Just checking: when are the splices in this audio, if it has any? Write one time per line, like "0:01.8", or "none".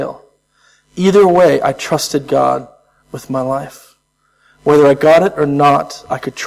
none